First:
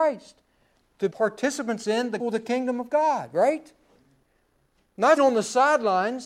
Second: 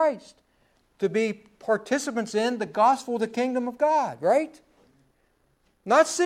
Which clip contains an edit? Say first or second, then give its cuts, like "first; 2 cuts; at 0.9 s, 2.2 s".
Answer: first; 3 cuts; at 1.1 s, 2.2 s, 5.2 s